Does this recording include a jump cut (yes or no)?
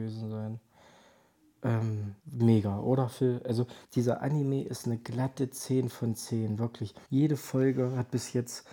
yes